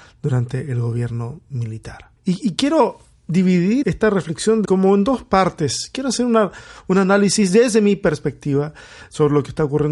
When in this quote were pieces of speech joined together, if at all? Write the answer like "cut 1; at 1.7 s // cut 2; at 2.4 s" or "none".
cut 1; at 2.2 s // cut 2; at 3.8 s // cut 3; at 4.6 s